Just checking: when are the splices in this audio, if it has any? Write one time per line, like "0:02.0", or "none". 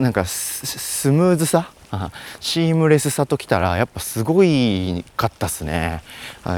0:05.1

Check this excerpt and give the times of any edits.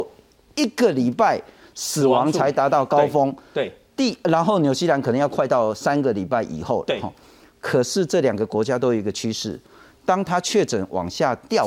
none

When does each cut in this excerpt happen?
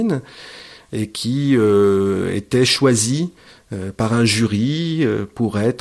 none

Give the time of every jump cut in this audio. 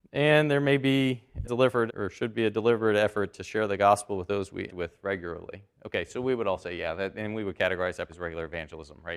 0:01.4
0:01.9
0:04.7
0:08.1

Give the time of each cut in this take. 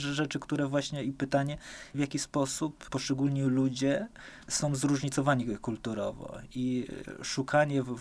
none

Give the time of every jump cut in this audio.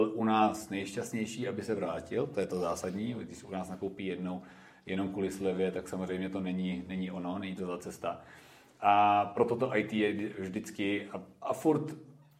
none

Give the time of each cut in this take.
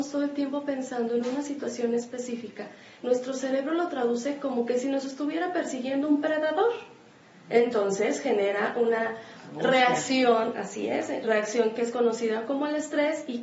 none

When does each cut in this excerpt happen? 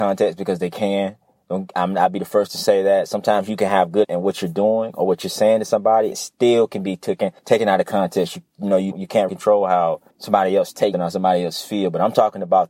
0:04.0
0:06.1
0:07.4
0:08.9
0:09.3
0:10.1
0:10.9

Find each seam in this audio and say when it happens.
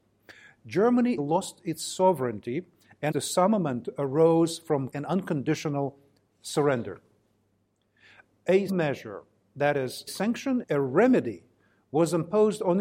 0:01.2
0:03.1
0:04.9
0:08.7
0:10.1
0:10.6

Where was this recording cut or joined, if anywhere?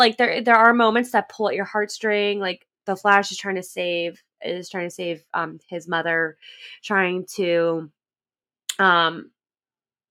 none

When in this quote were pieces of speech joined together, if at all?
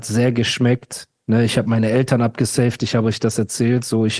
none

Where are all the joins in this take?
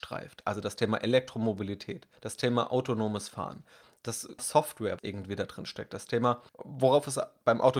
0:02.2
0:04.4
0:05.0
0:06.5

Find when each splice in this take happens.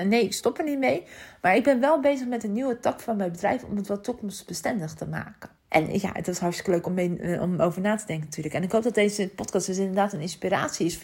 0:05.6

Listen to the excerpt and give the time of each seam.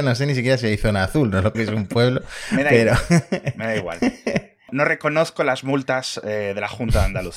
0:01.5

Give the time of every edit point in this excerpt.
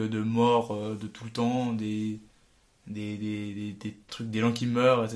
none

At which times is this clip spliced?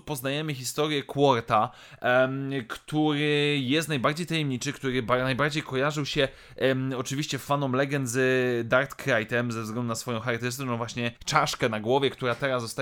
0:11.2

